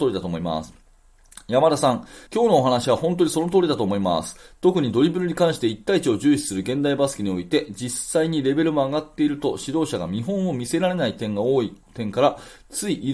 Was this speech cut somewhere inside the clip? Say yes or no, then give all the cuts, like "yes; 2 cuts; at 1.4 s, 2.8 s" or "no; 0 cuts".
yes; 2 cuts; at 2.3 s, 11.8 s